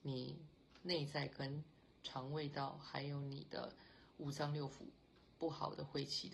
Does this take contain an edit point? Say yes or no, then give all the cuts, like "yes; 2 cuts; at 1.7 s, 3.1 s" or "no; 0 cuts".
no; 0 cuts